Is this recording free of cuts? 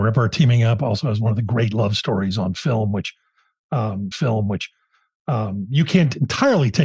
no; 1 cut; at 4.1 s

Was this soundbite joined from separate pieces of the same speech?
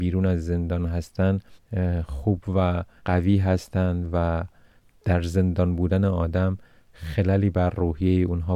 no; 0 cuts

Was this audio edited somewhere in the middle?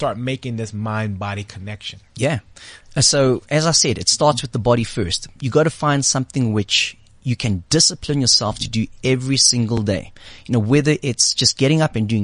no; 0 cuts

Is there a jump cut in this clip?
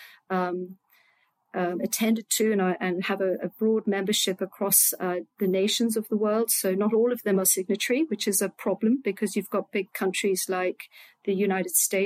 no; 0 cuts

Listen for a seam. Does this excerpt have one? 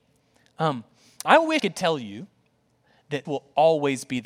yes; 3 cuts; at 1.3 s, 1.6 s, 3.2 s

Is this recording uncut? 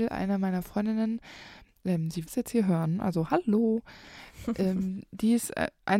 no; 1 cut; at 2.3 s

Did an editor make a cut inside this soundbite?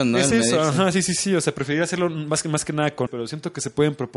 yes; 1 cut; at 3.1 s

